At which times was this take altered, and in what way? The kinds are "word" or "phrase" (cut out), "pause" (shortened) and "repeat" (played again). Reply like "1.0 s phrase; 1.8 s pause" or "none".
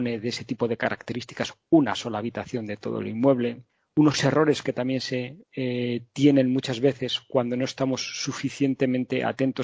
3.7 s pause; 5.4 s pause